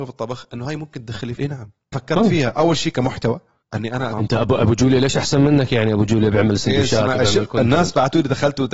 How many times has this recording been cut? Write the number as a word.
four